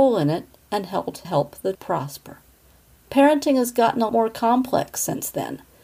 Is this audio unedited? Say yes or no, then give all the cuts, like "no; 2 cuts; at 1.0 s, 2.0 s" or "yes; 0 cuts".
no; 3 cuts; at 1.2 s, 1.7 s, 4.1 s